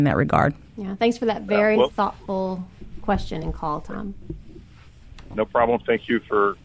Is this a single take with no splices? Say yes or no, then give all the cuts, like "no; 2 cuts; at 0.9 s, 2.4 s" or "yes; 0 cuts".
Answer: yes; 0 cuts